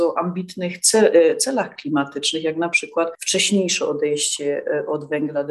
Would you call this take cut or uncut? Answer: uncut